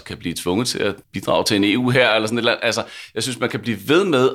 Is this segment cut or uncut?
cut